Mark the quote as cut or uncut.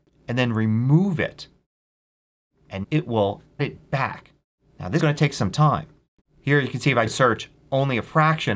cut